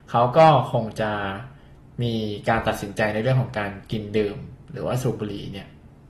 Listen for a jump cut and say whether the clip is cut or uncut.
uncut